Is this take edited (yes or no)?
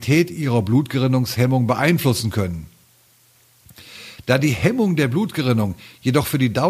no